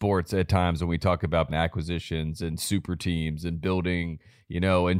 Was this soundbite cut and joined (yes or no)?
yes